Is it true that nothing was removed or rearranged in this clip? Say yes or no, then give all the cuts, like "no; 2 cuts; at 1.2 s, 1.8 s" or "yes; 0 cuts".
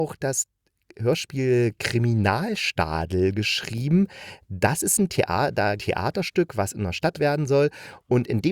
no; 2 cuts; at 5.8 s, 7.1 s